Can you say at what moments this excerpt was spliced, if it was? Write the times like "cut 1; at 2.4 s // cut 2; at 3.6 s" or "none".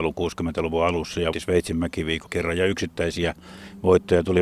cut 1; at 1.3 s // cut 2; at 2.3 s